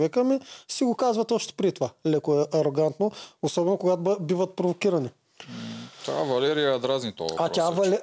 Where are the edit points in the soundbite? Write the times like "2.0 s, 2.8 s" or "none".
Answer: none